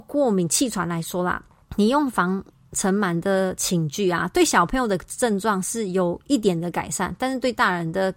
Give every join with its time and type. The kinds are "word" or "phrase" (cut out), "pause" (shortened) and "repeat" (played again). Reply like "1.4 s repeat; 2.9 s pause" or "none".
none